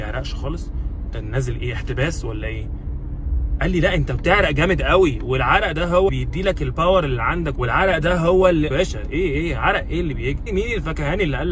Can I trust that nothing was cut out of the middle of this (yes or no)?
no